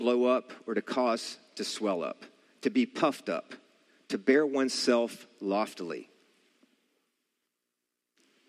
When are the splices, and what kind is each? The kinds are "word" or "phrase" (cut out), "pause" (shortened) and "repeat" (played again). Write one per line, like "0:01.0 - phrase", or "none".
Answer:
none